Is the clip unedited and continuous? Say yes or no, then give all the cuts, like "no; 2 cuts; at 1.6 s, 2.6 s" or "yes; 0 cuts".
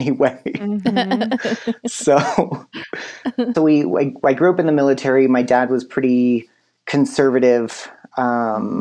no; 1 cut; at 3.5 s